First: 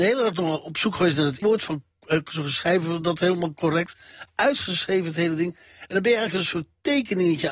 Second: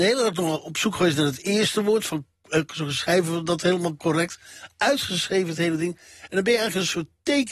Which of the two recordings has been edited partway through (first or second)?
first